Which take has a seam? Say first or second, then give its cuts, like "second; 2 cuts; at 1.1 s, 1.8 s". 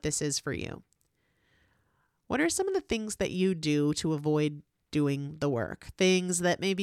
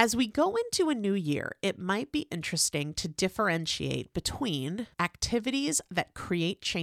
second; 1 cut; at 4.9 s